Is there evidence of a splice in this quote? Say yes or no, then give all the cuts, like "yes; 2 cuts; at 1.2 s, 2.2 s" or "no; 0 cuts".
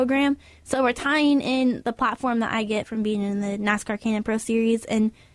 no; 0 cuts